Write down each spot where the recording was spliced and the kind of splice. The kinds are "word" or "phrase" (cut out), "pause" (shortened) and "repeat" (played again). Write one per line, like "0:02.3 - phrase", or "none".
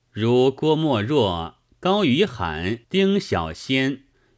0:02.8 - pause